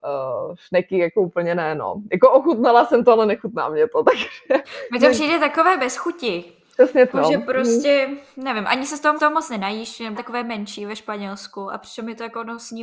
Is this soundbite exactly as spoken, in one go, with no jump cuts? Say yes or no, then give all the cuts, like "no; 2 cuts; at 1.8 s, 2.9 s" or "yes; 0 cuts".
no; 3 cuts; at 7.1 s, 9.2 s, 10.1 s